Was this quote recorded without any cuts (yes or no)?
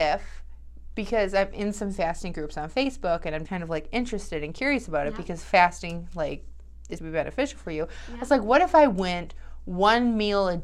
no